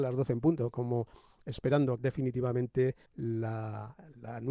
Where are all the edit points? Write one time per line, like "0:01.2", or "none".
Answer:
0:02.0
0:03.1